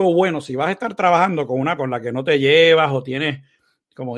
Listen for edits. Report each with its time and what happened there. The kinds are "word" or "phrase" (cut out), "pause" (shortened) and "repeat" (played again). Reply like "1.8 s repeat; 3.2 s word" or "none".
1.8 s word